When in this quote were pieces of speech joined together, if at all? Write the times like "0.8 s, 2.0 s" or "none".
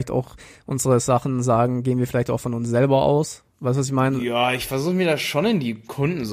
none

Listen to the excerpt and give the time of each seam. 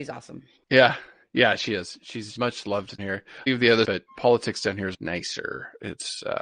2.4 s, 3.0 s, 3.5 s, 3.8 s, 4.9 s

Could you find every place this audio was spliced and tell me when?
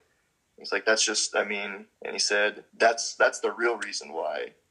1.9 s, 2.7 s

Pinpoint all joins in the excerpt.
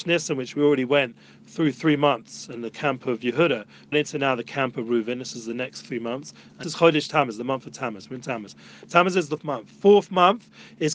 3.9 s, 6.6 s, 9.4 s

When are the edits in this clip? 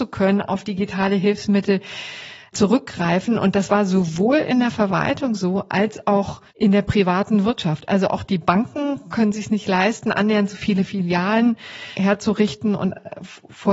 6.5 s

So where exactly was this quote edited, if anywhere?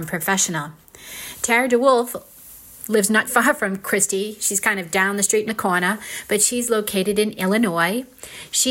3.3 s, 5.5 s

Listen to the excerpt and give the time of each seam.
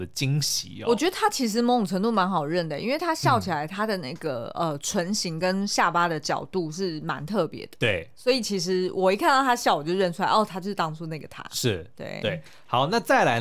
none

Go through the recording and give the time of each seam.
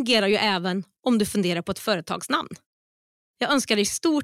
none

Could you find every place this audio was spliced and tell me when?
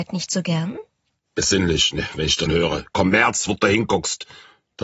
2.5 s

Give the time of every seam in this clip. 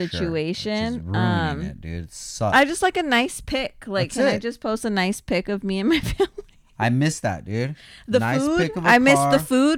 none

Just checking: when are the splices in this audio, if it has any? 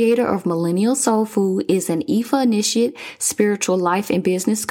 none

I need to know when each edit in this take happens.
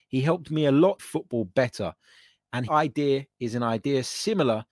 1.0 s, 2.7 s

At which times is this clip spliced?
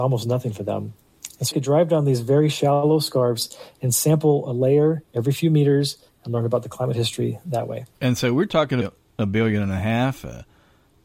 1.5 s, 5.0 s, 7.9 s, 8.8 s

